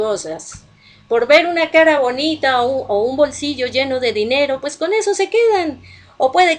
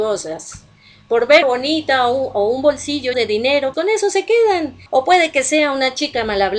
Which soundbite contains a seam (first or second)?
second